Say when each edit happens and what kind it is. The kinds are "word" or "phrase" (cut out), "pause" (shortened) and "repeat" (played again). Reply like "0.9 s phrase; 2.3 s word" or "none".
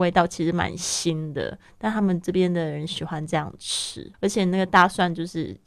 4.1 s pause